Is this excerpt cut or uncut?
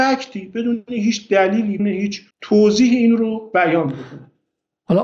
cut